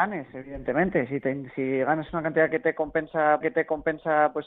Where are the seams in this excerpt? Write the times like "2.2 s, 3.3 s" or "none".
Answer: 3.4 s